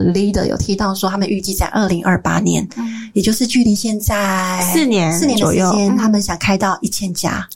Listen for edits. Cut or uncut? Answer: uncut